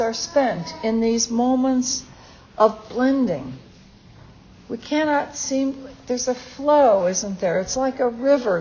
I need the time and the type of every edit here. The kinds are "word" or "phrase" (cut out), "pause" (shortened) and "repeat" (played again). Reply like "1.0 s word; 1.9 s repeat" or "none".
none